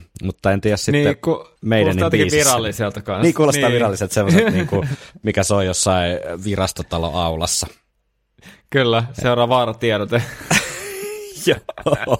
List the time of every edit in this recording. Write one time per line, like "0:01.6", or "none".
0:01.6